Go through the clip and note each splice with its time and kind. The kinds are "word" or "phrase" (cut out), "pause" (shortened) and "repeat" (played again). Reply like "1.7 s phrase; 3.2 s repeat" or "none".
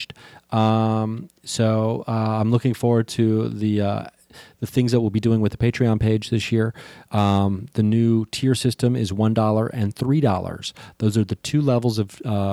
none